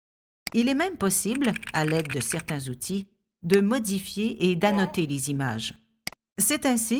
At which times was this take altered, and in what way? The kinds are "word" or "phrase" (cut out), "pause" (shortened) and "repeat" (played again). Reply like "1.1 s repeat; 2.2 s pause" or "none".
none